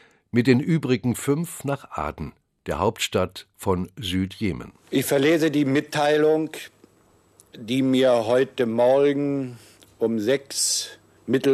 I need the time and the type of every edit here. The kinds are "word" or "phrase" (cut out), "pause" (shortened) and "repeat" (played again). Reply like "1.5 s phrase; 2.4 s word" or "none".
none

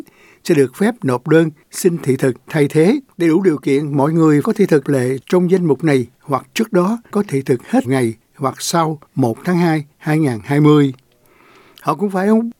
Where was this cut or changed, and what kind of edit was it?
3.1 s pause; 4.4 s word; 4.8 s word; 6.1 s pause; 7.1 s word; 7.8 s phrase; 9.1 s pause; 9.9 s pause

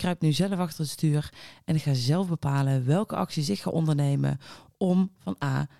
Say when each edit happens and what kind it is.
none

